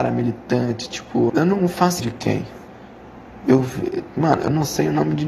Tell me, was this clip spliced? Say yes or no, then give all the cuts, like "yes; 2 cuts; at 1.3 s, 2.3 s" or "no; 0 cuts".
yes; 2 cuts; at 1.3 s, 2.0 s